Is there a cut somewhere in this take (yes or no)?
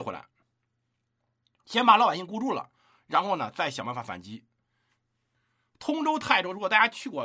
no